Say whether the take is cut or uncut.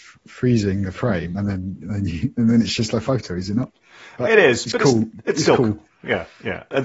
uncut